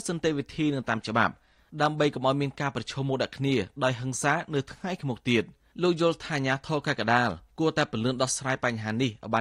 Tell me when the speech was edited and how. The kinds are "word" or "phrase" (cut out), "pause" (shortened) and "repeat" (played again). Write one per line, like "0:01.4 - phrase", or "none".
0:05.7 - pause